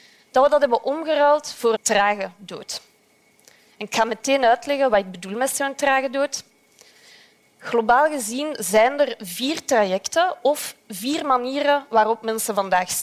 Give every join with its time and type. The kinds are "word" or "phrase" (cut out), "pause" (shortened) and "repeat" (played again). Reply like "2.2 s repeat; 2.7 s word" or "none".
1.8 s word